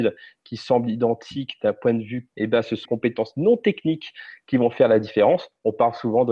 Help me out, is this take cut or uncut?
cut